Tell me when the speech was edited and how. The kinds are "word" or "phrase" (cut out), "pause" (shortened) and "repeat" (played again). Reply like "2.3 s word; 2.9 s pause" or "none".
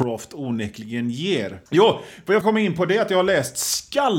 1.7 s pause; 2.4 s word